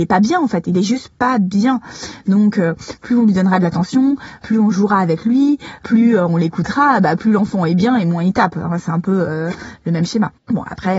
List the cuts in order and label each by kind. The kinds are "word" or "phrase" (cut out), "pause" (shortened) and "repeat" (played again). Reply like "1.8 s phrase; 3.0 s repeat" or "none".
none